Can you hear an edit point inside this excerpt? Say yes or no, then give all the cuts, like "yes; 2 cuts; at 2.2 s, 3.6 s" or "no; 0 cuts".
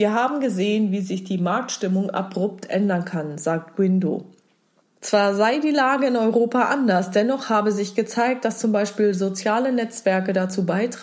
no; 0 cuts